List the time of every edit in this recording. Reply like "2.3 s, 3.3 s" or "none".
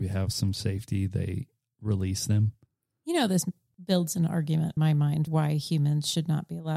4.8 s, 5.3 s